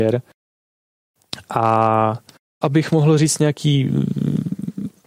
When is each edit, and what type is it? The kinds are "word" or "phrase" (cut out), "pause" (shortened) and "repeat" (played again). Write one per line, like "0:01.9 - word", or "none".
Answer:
0:02.6 - word